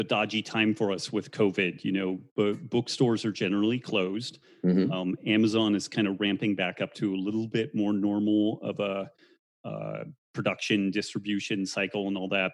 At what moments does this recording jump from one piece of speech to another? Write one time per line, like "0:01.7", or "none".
none